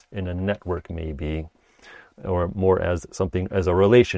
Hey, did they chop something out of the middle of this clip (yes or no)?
no